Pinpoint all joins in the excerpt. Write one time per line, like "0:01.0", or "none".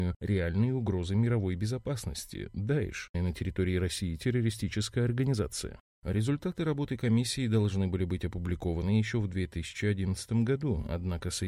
0:03.1